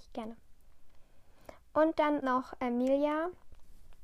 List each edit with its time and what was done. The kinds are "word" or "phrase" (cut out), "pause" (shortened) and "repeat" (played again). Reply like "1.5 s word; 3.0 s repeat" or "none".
2.2 s word